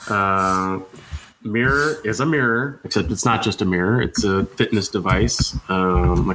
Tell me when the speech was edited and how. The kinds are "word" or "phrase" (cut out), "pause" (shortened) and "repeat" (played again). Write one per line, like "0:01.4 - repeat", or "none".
none